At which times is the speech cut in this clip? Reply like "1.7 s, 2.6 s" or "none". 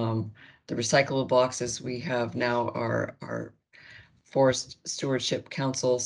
none